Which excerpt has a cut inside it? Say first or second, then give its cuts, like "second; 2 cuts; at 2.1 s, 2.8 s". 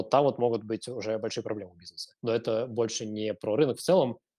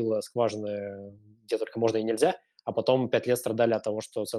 first; 1 cut; at 2.2 s